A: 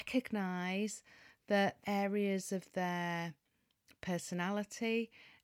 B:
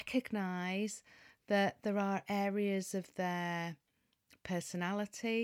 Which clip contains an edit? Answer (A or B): A